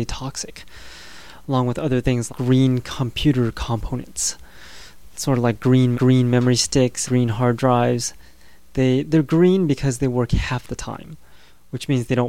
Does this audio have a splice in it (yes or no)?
yes